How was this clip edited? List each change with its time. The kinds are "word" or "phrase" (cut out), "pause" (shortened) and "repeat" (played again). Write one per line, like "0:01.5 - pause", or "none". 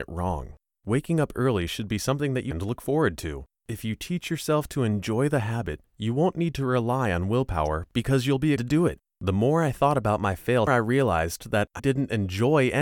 0:02.5 - word
0:03.5 - pause
0:08.6 - word
0:10.7 - phrase
0:11.8 - word